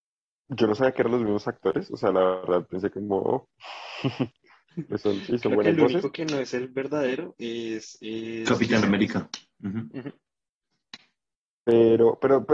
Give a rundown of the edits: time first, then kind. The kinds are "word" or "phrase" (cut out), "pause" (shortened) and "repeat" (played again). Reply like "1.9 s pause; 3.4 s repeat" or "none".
none